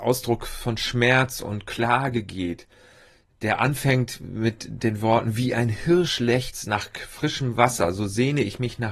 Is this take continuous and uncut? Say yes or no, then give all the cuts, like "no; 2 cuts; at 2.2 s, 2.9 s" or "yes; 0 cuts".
yes; 0 cuts